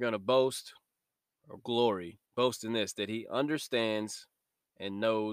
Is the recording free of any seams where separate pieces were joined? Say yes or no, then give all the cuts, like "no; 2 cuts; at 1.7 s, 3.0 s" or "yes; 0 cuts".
no; 1 cut; at 2.2 s